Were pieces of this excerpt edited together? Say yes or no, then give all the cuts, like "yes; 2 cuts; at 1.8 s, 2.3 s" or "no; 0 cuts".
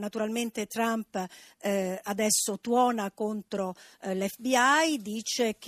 no; 0 cuts